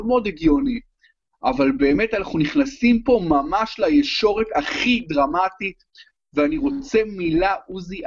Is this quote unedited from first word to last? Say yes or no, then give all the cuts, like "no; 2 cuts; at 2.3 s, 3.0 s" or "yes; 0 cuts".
yes; 0 cuts